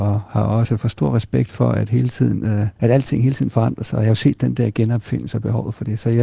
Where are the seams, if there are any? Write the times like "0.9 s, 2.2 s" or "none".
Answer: 2.7 s

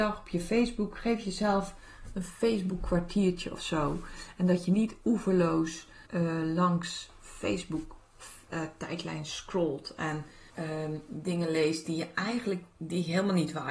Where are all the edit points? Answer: 6.1 s, 10.5 s

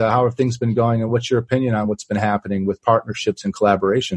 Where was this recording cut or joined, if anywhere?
none

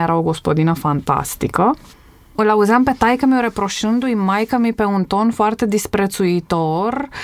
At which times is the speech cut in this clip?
none

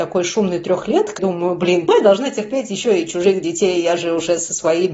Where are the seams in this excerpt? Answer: 1.2 s, 1.9 s

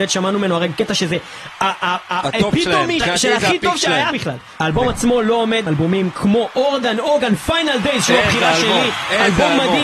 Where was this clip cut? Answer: 3.0 s, 4.1 s, 5.7 s

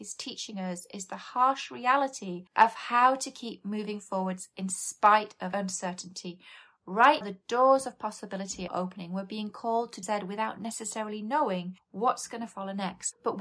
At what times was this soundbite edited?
2.5 s, 7.2 s, 8.7 s, 10.0 s

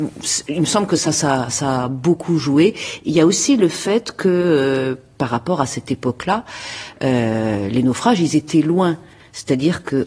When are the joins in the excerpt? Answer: none

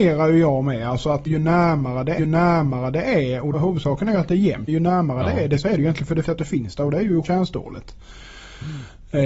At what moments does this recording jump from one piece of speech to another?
1.3 s, 2.2 s, 3.5 s, 4.7 s, 5.6 s, 6.2 s, 7.2 s

